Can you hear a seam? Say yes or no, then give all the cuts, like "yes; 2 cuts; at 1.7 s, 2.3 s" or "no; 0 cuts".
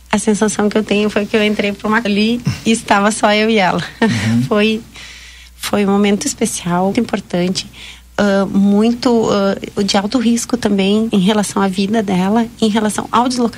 yes; 4 cuts; at 2.1 s, 6.2 s, 6.9 s, 11.1 s